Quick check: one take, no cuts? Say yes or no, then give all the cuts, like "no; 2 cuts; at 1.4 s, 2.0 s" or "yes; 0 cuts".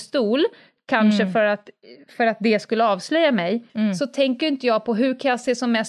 no; 1 cut; at 3.7 s